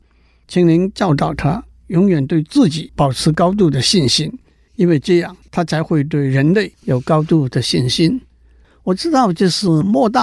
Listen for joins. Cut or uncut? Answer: uncut